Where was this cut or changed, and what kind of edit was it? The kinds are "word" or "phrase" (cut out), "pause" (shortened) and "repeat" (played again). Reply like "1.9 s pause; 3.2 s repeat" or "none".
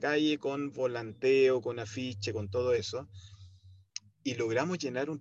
none